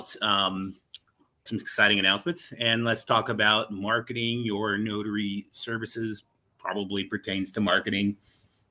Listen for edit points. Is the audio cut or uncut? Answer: cut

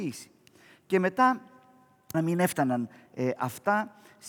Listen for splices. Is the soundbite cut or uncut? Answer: cut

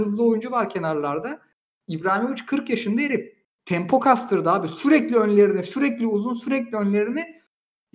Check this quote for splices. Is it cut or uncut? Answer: uncut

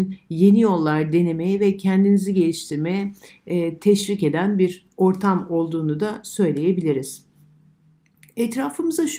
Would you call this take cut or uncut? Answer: uncut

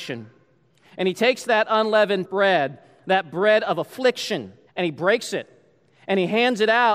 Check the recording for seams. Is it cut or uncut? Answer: cut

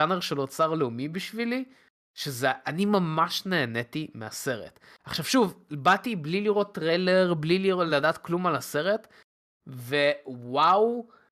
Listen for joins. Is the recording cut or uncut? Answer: uncut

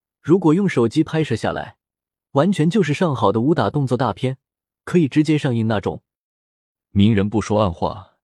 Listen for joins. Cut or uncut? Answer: uncut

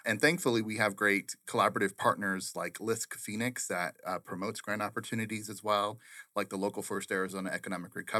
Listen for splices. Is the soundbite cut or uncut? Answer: uncut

